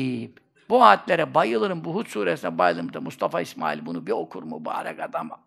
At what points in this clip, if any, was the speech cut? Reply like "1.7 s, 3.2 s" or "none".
none